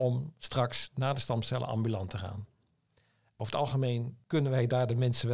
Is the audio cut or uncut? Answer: uncut